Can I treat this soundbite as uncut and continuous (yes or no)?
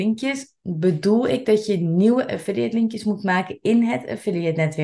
yes